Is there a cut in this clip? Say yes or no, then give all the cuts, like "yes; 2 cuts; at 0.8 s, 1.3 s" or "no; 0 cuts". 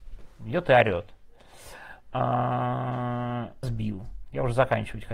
yes; 1 cut; at 3.6 s